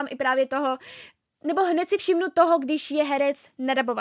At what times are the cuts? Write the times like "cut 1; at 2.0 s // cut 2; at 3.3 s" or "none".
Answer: none

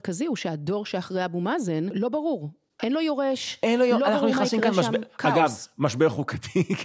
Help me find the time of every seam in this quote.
none

